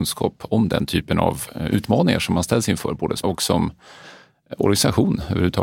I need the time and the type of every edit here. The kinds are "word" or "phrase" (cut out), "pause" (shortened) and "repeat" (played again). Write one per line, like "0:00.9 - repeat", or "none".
0:03.2 - word